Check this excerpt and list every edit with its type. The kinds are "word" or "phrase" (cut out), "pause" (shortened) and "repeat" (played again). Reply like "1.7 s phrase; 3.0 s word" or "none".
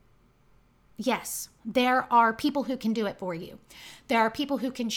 1.6 s pause